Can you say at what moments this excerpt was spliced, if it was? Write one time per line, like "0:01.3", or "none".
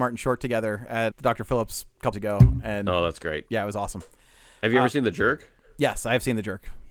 0:01.1
0:02.1